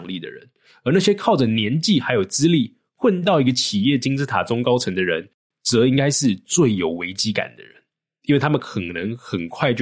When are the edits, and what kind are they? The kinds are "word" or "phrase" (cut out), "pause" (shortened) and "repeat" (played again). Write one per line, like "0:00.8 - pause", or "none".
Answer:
none

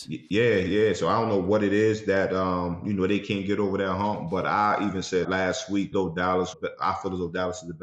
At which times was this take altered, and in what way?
0:05.2 - word
0:05.9 - word
0:06.5 - phrase

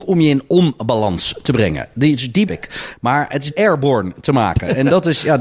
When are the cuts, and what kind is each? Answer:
0:02.5 - word
0:03.5 - phrase

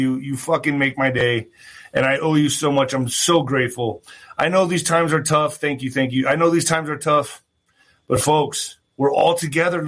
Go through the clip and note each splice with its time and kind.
none

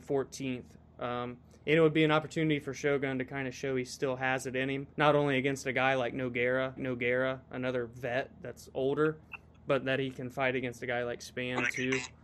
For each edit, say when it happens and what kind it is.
0:04.9 - pause
0:06.8 - repeat

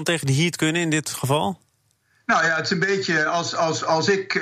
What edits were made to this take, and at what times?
none

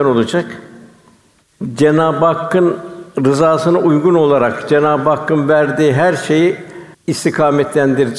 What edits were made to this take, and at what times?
0:06.9 - pause

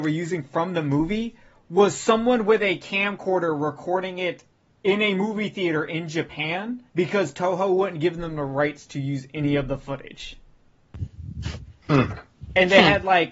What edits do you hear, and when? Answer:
0:06.9 - pause

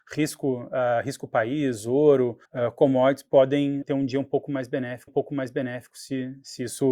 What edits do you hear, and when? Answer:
0:02.4 - pause
0:03.8 - word
0:05.1 - repeat

